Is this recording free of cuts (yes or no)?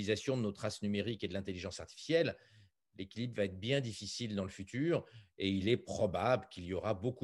yes